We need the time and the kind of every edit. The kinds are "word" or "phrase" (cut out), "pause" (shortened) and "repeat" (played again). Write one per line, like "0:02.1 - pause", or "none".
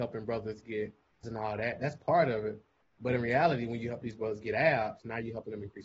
0:01.2 - word